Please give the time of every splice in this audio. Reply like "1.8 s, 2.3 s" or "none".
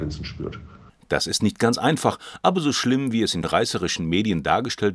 3.4 s